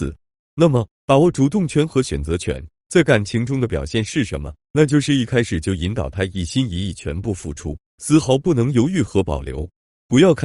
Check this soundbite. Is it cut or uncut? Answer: cut